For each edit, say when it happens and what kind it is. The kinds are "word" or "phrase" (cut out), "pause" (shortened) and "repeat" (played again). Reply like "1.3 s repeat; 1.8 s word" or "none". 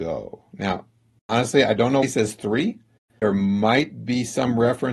2.0 s word; 3.0 s pause